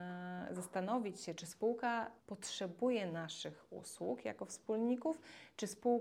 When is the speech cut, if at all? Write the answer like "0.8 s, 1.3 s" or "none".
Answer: 2.2 s